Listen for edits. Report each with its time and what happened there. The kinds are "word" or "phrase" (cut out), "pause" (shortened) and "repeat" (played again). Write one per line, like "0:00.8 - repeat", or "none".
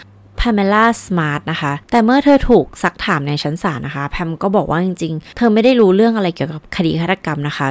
0:01.8 - pause
0:05.3 - word